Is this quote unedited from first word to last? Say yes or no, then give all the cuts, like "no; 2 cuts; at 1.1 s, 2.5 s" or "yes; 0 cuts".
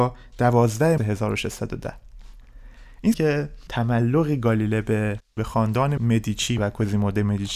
no; 3 cuts; at 1.0 s, 3.1 s, 3.7 s